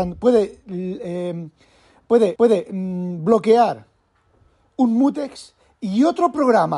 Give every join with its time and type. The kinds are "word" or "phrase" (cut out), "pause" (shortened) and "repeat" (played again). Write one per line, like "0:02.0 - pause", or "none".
0:02.4 - repeat

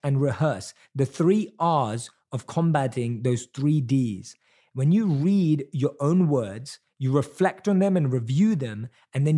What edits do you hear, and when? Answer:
none

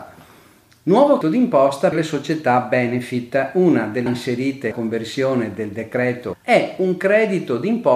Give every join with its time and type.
0:01.2 - word
0:01.9 - word
0:04.1 - word
0:04.7 - word
0:06.3 - word

